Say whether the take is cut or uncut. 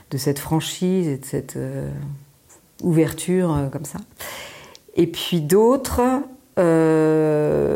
uncut